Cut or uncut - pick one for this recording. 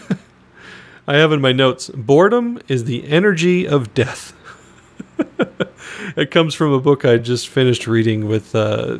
uncut